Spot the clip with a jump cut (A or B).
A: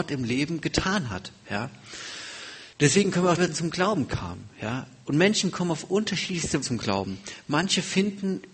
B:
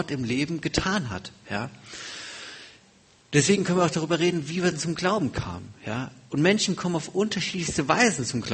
A